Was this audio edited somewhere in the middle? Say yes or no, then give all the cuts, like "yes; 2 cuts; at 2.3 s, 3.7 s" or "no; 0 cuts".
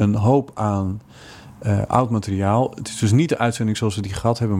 no; 0 cuts